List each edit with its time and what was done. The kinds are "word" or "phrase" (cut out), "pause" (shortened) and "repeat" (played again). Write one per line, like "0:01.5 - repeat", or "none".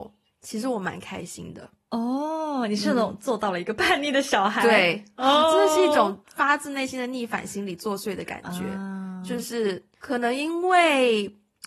0:06.2 - pause
0:09.9 - pause